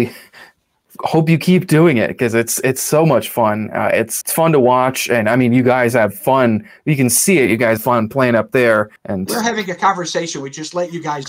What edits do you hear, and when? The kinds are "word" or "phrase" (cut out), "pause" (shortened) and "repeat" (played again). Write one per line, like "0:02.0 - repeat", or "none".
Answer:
0:04.2 - word
0:07.8 - word
0:09.0 - pause